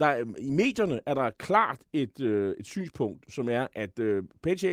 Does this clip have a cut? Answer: no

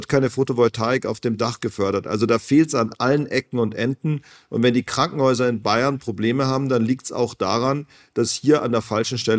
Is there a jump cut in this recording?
no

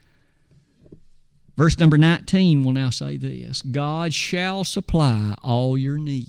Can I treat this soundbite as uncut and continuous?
yes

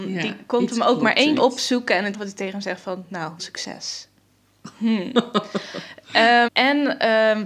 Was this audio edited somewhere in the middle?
yes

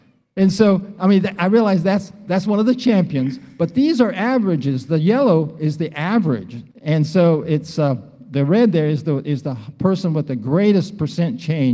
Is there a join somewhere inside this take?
yes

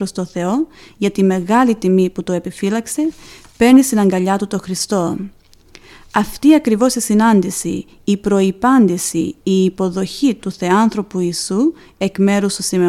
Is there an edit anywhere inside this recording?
no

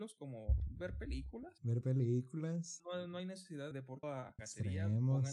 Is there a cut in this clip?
yes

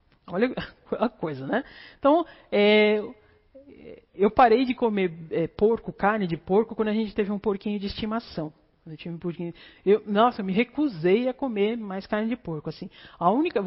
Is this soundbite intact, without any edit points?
yes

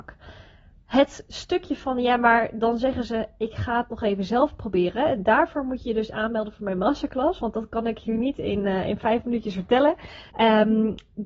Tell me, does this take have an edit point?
yes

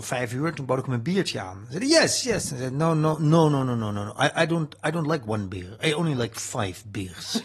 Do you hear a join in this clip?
no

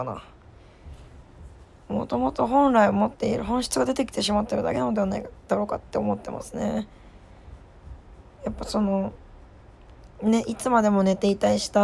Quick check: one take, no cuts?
yes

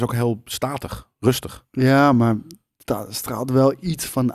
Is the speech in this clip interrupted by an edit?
no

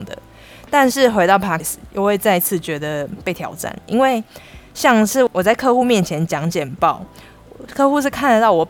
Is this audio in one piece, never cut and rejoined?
no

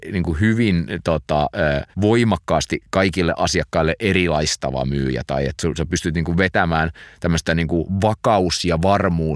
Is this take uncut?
no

